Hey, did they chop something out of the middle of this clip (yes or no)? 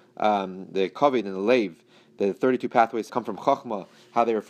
yes